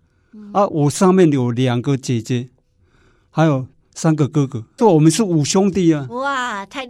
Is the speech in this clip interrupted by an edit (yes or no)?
yes